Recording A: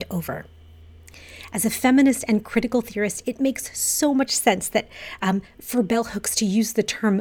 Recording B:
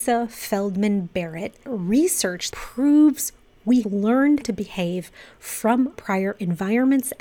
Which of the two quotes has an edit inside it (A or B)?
B